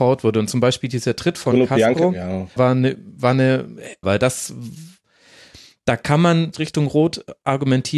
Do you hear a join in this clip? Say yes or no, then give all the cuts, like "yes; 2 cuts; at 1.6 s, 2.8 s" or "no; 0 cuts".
yes; 3 cuts; at 2.6 s, 4.0 s, 6.5 s